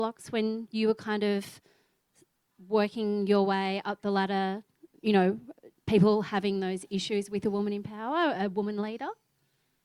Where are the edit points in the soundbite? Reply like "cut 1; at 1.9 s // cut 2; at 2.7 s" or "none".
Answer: cut 1; at 5.8 s